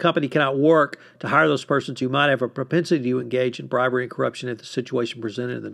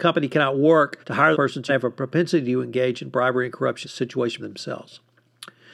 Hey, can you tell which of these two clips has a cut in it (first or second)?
second